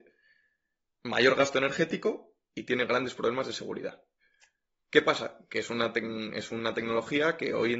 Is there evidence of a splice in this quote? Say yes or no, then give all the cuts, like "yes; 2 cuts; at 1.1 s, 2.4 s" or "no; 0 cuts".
no; 0 cuts